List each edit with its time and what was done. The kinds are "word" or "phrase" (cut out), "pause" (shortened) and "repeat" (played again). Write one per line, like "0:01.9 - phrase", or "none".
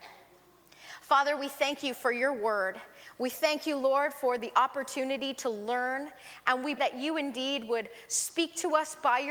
0:06.8 - word